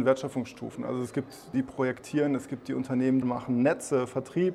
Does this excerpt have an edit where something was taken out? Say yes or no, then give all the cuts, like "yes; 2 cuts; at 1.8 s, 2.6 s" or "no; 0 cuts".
yes; 2 cuts; at 1.5 s, 3.2 s